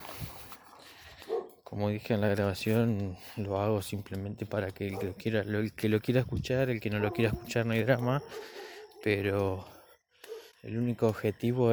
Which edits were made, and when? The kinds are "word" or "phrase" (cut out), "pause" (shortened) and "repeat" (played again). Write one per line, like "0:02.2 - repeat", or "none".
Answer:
0:10.5 - pause